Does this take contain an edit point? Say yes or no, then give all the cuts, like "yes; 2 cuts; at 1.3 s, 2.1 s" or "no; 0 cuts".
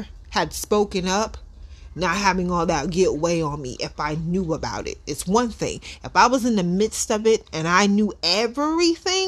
no; 0 cuts